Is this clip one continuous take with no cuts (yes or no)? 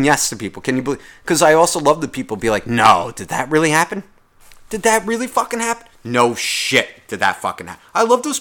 yes